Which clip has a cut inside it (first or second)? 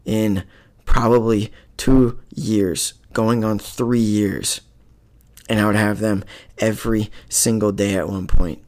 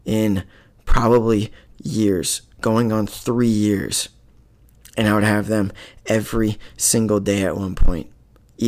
second